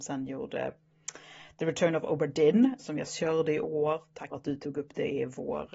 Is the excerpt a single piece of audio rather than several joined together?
no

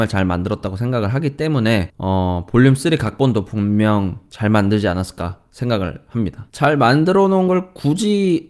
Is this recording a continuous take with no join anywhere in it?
yes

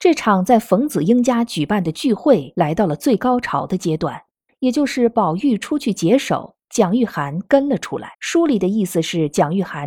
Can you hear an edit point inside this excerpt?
yes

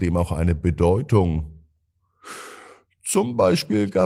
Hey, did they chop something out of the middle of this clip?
no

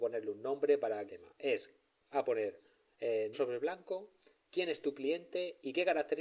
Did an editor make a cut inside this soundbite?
yes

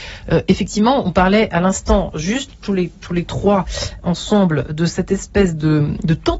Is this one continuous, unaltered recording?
yes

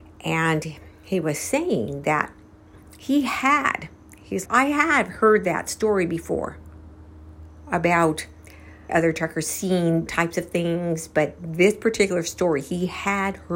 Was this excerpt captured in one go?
no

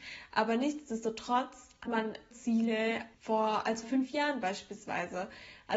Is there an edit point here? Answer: yes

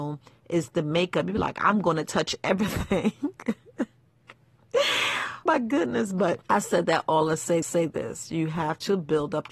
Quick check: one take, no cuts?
no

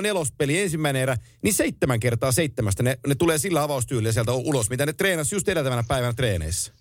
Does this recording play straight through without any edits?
yes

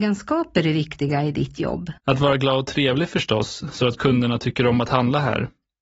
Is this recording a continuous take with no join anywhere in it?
no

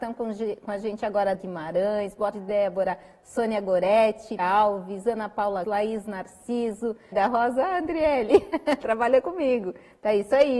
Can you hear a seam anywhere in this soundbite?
yes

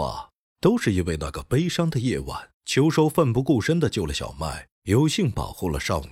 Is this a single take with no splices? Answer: no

